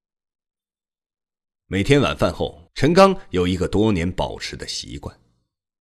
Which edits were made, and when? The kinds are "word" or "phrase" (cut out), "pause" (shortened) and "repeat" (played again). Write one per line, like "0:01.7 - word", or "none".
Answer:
0:02.7 - pause